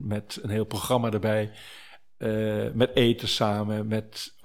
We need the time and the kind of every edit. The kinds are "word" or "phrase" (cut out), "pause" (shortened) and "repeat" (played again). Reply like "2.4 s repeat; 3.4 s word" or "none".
none